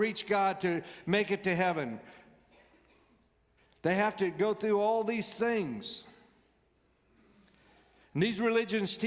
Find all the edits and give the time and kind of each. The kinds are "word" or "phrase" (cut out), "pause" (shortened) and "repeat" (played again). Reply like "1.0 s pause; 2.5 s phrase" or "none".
none